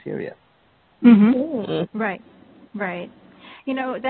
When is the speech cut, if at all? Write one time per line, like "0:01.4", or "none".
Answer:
0:02.7

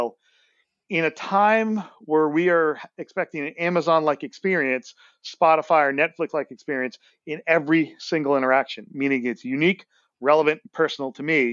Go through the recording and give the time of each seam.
none

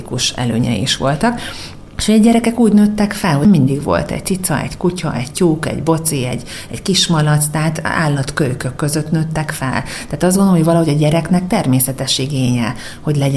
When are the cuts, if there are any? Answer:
none

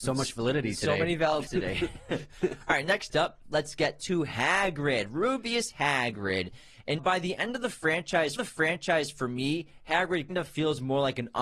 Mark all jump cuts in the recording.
0:01.5
0:07.0
0:08.4
0:10.3

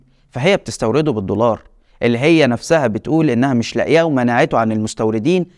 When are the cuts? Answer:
none

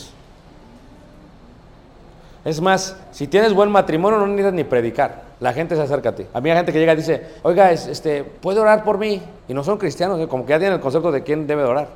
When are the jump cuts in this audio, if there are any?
0:03.0
0:05.3
0:06.3
0:07.4
0:08.4
0:09.4

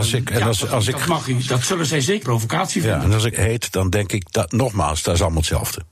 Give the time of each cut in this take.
0:02.2
0:03.3

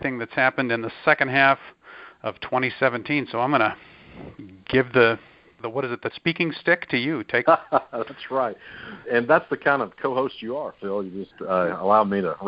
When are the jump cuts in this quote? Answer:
0:05.6
0:06.1
0:07.5
0:09.0

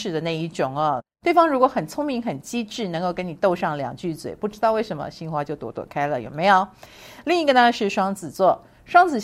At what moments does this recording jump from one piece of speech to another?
none

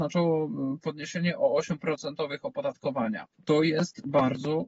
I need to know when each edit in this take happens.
0:01.8
0:03.3

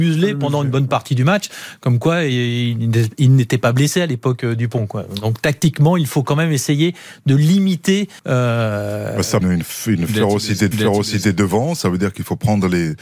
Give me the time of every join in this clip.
0:08.2
0:09.4
0:10.7

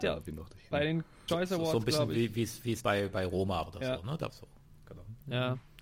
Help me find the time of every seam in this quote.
0:01.3
0:02.8
0:03.7
0:04.3

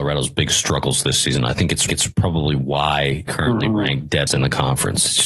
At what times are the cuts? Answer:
0:01.9
0:03.3
0:04.3

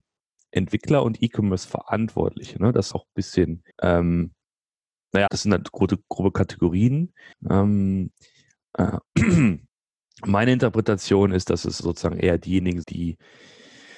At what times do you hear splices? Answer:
0:02.9
0:03.7
0:05.3
0:05.7
0:07.3
0:09.7
0:11.8
0:12.8

